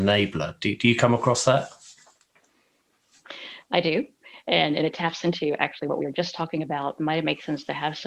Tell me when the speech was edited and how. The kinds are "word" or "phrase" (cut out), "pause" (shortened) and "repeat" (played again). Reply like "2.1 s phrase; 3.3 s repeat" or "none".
none